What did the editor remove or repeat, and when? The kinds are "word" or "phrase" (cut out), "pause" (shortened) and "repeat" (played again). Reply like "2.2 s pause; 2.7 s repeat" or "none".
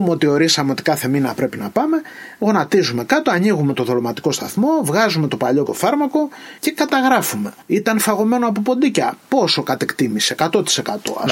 5.7 s word; 6.6 s phrase; 7.6 s pause